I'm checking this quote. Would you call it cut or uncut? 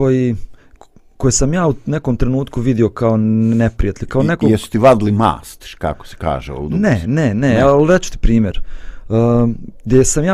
uncut